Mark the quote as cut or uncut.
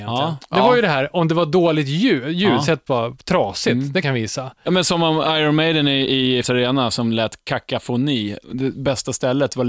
cut